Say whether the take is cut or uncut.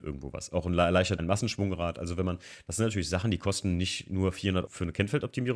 cut